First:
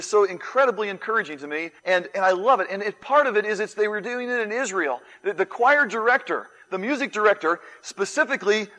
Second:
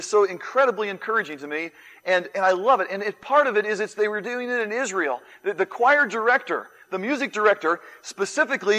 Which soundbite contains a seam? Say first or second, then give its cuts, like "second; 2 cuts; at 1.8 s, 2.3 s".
first; 1 cut; at 1.8 s